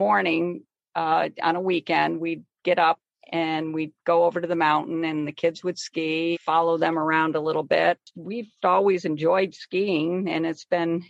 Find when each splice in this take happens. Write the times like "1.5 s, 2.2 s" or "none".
3.1 s, 6.3 s, 8.6 s